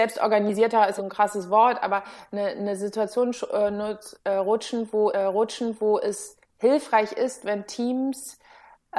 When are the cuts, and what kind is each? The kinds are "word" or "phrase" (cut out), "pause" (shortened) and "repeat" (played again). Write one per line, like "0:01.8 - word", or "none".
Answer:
0:01.0 - phrase
0:05.1 - repeat